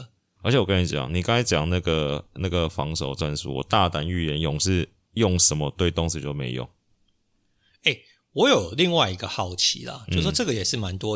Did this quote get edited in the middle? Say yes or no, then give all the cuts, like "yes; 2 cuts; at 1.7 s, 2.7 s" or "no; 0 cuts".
no; 0 cuts